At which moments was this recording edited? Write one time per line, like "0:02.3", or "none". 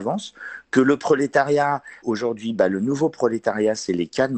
0:02.0